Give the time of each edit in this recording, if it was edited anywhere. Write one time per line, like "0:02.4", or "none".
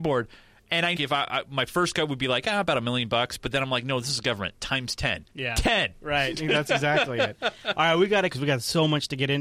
0:01.0
0:05.3
0:08.3

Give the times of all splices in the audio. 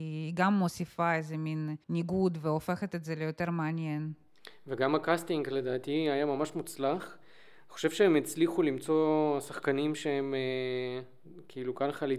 0:01.8

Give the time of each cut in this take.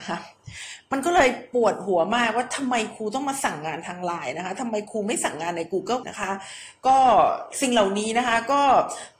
0:06.0

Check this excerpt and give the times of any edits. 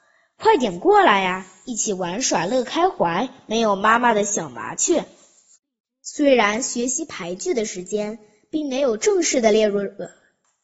none

